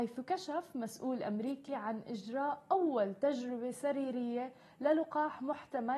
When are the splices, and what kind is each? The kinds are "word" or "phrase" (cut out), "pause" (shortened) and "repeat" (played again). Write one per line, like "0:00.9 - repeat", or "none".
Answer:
none